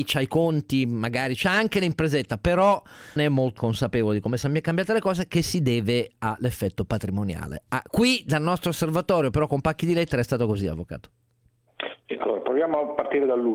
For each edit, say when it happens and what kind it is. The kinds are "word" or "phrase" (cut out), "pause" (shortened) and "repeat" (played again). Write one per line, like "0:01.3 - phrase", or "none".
0:01.4 - phrase
0:03.2 - word
0:03.6 - word